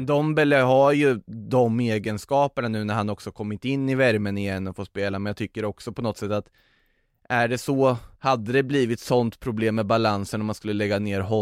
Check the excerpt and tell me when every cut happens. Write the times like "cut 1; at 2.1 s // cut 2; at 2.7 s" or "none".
cut 1; at 8.1 s

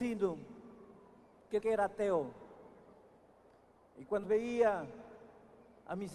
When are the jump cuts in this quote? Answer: cut 1; at 1.6 s // cut 2; at 4.2 s

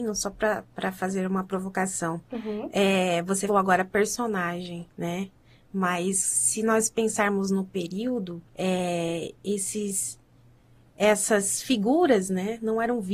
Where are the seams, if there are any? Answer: cut 1; at 3.5 s // cut 2; at 4.9 s // cut 3; at 8.5 s

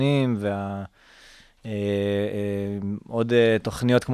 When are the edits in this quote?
none

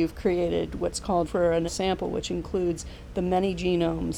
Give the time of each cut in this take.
cut 1; at 1.3 s // cut 2; at 1.7 s

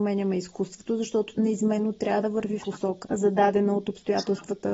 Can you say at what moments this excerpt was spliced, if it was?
cut 1; at 1.4 s // cut 2; at 2.6 s // cut 3; at 3.0 s

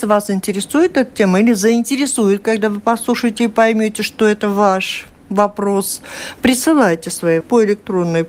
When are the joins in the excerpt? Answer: cut 1; at 7.4 s

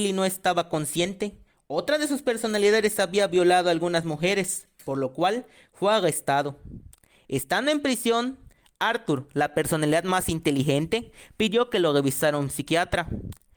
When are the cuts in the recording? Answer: none

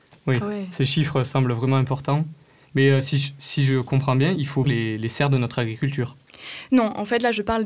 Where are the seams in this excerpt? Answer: cut 1; at 4.6 s

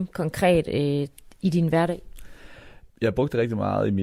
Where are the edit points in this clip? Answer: cut 1; at 2.9 s

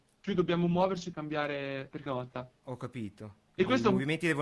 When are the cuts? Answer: cut 1; at 1.1 s // cut 2; at 2.1 s

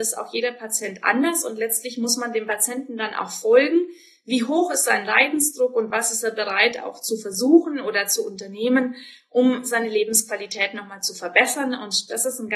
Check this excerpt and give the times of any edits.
none

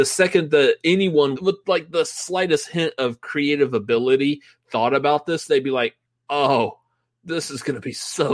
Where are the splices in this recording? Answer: cut 1; at 1.4 s

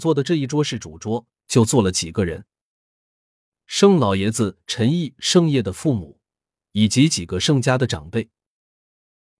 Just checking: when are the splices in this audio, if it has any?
none

